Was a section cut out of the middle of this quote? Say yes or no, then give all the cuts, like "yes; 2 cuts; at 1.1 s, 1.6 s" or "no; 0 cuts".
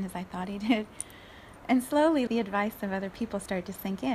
yes; 1 cut; at 2.3 s